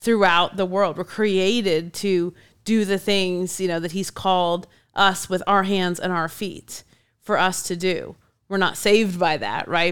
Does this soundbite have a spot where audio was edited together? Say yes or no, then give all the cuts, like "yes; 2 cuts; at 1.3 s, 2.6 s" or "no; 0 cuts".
no; 0 cuts